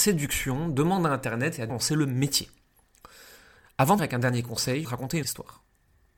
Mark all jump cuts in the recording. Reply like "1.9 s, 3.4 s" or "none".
1.7 s, 4.0 s, 4.8 s, 5.2 s